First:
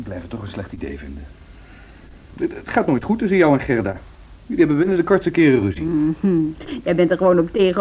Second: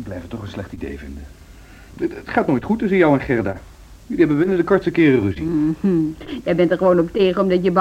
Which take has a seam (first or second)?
second